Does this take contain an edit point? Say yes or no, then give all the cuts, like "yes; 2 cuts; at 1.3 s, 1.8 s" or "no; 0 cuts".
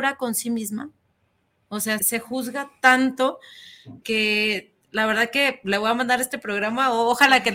yes; 2 cuts; at 2.0 s, 4.0 s